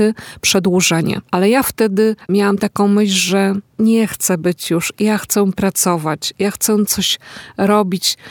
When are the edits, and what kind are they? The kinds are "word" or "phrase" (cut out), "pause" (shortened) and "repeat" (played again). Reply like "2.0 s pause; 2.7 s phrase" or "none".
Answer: none

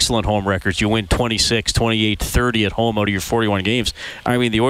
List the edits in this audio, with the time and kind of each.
none

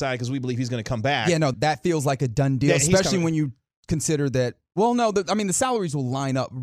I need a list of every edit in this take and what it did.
1.5 s word

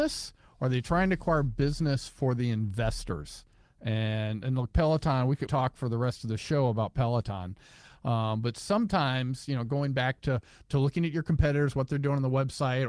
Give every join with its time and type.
5.5 s phrase

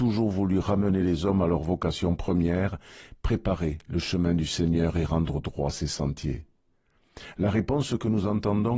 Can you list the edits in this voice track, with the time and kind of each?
none

